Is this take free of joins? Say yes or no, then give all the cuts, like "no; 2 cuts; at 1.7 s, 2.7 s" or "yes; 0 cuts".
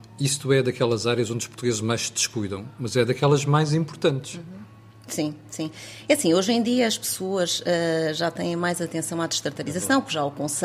yes; 0 cuts